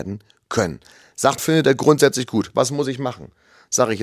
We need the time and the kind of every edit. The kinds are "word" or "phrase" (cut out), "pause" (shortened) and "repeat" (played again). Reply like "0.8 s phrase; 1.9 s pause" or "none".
1.4 s word